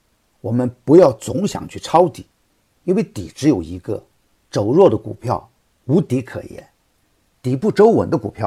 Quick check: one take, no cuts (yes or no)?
yes